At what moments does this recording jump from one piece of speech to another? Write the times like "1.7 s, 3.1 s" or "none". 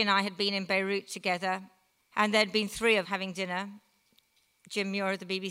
2.0 s, 3.0 s

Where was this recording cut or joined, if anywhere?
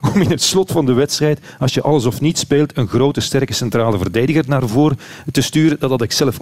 none

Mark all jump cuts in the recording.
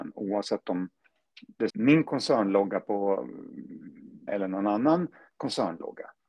1.7 s, 4.3 s

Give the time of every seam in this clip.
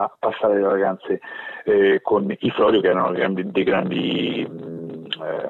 none

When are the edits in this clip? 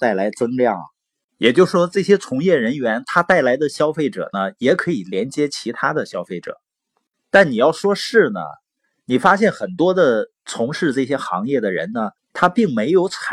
12.2 s

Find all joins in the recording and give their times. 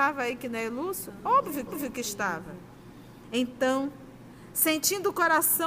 1.7 s

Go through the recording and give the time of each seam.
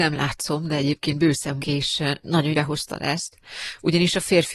1.6 s, 2.5 s

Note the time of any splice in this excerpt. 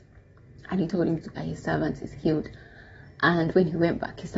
1.3 s

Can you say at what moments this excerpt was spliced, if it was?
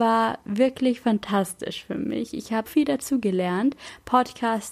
2.7 s

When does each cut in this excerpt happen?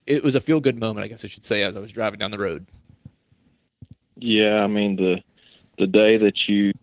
4.0 s

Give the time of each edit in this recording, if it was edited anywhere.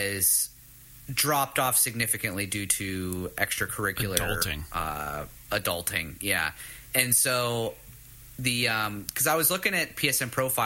none

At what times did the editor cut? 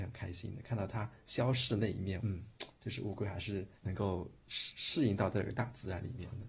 2.2 s, 3.8 s

